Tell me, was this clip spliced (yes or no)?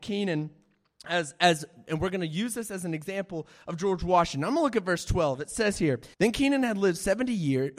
yes